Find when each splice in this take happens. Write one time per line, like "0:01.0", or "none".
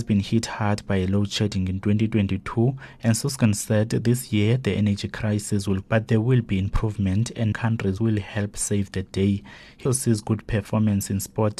0:05.8
0:07.5
0:09.9